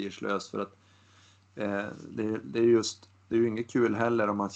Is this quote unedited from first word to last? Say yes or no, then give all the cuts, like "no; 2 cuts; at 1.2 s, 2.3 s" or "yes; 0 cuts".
yes; 0 cuts